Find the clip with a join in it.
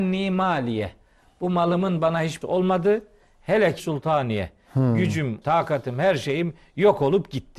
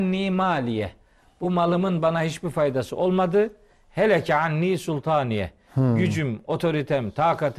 first; 3 cuts; at 2.4 s, 3.8 s, 5.4 s

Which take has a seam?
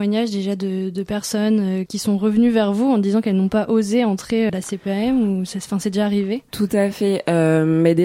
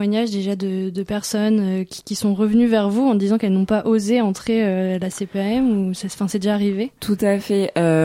first; 2 cuts; at 1.9 s, 4.5 s

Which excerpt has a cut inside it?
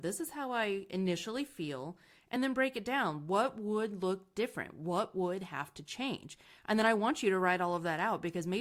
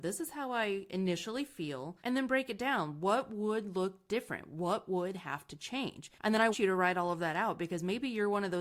second; 3 cuts; at 2.0 s, 6.2 s, 6.5 s

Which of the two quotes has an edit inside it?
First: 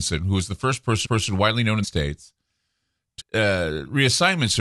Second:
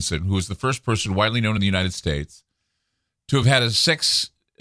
first; 3 cuts; at 1.0 s, 1.8 s, 3.2 s

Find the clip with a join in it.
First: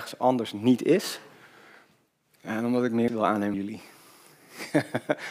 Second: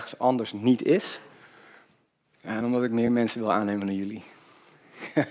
first; 2 cuts; at 3.1 s, 3.5 s

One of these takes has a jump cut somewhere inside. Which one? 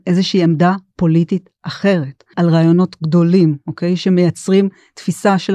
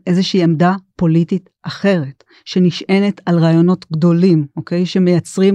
first; 1 cut; at 2.3 s

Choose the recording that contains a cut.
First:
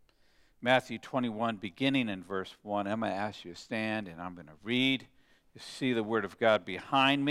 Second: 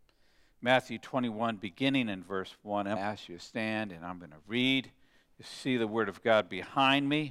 second; 1 cut; at 3.0 s

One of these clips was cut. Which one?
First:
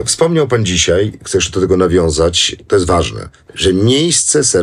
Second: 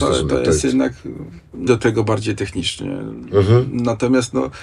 second; 1 cut; at 1.7 s

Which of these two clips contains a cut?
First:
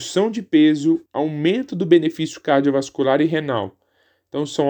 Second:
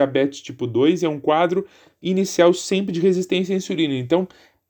first; 1 cut; at 1.1 s

